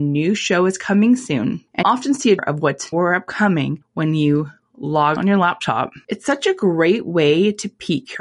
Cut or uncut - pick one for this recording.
cut